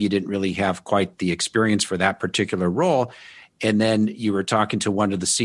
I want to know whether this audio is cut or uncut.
uncut